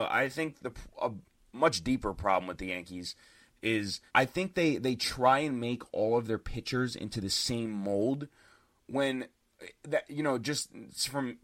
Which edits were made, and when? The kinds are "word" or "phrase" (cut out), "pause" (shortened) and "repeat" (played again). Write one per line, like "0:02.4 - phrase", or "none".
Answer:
0:04.1 - pause